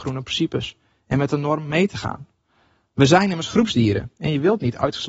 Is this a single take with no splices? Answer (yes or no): yes